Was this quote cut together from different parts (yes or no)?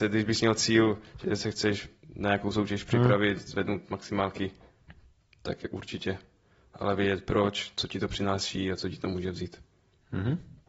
no